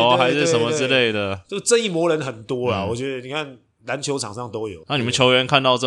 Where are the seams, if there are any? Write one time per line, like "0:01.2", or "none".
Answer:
0:04.8

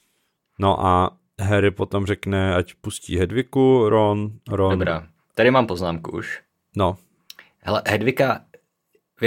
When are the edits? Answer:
none

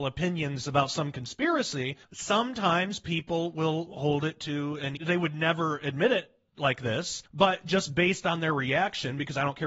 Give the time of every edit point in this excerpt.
0:02.0
0:05.0
0:07.3

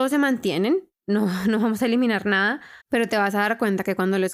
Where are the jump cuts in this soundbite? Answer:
0:02.8

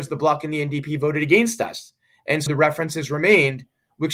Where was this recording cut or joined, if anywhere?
0:02.5

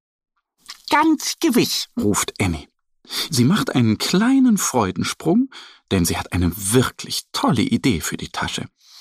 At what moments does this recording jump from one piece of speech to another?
0:01.9

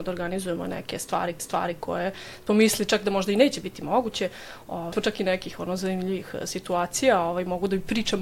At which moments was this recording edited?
0:01.4
0:04.9

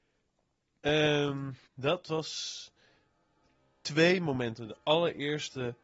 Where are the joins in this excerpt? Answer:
0:01.7

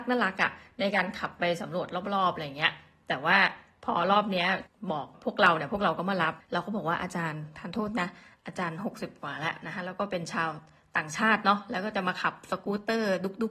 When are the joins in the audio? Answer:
none

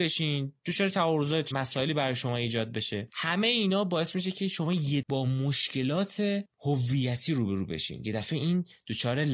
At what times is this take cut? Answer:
0:01.5
0:05.0
0:06.5

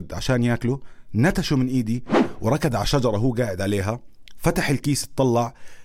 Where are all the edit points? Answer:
none

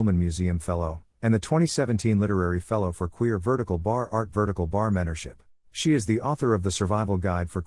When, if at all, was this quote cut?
0:05.6

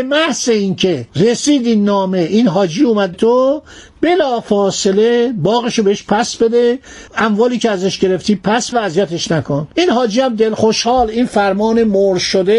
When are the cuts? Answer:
0:01.1
0:03.1
0:07.1
0:08.7
0:09.7
0:10.6

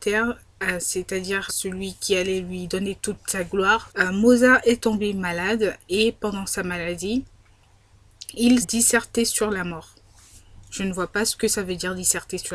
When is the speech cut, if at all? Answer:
0:01.5
0:03.9
0:08.6

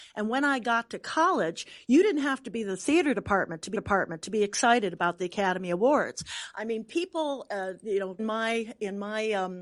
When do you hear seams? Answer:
0:03.7
0:08.2

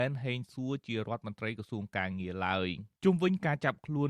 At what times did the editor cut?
0:03.0

